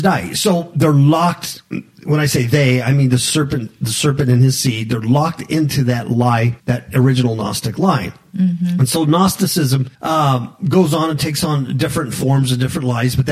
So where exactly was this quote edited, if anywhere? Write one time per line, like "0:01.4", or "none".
0:06.6
0:09.9